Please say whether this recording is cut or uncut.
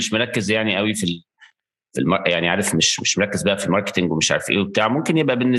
uncut